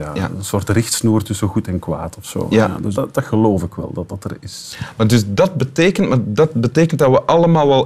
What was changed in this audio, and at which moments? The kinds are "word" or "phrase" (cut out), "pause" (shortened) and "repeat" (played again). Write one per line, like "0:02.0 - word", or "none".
0:02.9 - word
0:04.1 - word